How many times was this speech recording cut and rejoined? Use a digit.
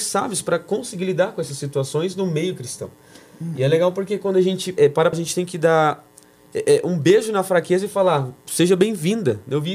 2